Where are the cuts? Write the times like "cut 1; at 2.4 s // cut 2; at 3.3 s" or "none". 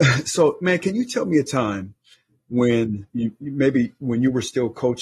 cut 1; at 3.1 s